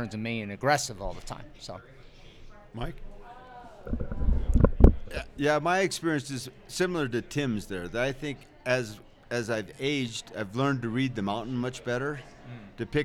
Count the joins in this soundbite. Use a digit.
0